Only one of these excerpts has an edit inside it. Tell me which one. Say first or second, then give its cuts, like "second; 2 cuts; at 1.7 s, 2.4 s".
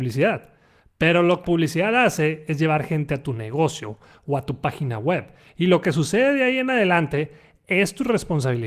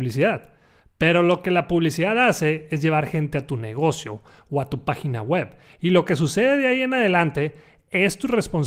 first; 1 cut; at 1.4 s